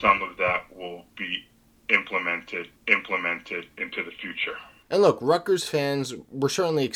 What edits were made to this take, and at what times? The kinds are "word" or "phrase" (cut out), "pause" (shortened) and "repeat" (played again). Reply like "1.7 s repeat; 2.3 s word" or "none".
2.8 s repeat